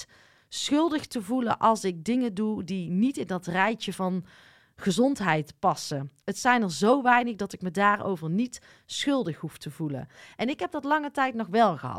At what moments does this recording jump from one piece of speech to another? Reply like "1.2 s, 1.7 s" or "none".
none